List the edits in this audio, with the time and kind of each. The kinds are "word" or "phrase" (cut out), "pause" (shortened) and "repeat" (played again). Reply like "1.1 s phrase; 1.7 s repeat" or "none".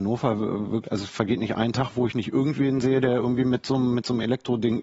none